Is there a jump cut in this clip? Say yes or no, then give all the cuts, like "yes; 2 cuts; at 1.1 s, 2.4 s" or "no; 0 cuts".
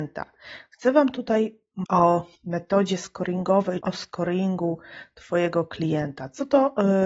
yes; 3 cuts; at 1.9 s, 2.4 s, 3.8 s